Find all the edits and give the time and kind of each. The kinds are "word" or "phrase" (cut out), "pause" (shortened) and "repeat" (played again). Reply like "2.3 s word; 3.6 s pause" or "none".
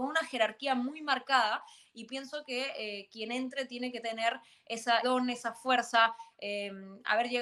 4.0 s word; 5.0 s word